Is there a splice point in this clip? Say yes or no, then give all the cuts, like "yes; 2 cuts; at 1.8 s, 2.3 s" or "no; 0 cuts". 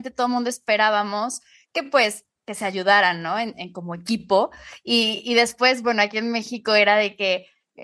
yes; 1 cut; at 2.4 s